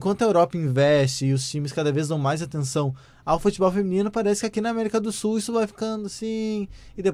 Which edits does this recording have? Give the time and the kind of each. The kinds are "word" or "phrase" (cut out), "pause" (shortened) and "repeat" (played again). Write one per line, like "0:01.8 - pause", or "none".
none